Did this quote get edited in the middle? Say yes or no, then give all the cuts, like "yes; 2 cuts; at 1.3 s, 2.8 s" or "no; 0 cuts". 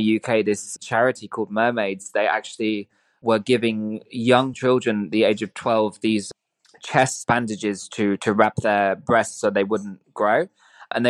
no; 0 cuts